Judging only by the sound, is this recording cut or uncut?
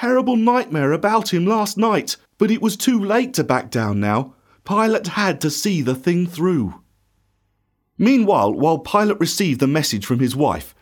cut